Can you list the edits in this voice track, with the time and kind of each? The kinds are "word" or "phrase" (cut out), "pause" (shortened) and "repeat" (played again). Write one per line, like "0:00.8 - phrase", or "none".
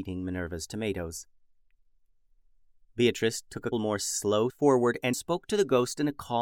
0:03.7 - word
0:04.5 - word
0:05.1 - word